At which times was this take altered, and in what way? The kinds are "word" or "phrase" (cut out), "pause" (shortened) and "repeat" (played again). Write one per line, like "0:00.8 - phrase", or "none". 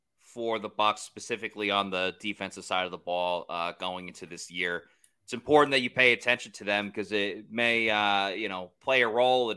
none

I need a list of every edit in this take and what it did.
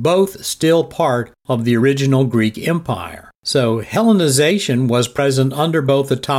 0:03.4 - pause

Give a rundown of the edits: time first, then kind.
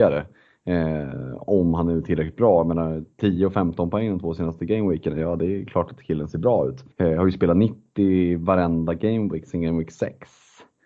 0:06.9 - pause

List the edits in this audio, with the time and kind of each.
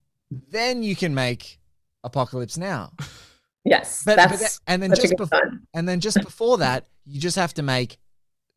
0:04.6 - pause

